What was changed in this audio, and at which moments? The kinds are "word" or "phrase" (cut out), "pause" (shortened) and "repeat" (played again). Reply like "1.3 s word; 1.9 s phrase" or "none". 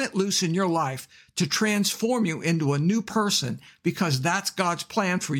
none